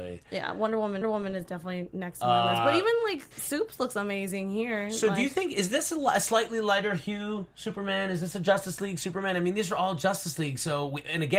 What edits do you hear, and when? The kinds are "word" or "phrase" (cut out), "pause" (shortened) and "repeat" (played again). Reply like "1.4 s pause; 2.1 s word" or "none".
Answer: 1.0 s repeat; 3.3 s pause